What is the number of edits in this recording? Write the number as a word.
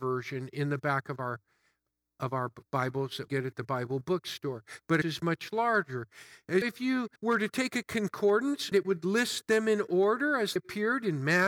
seven